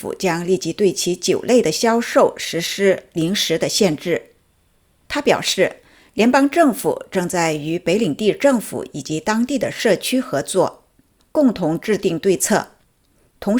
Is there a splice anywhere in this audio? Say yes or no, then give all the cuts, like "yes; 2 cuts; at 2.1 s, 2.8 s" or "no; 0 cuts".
no; 0 cuts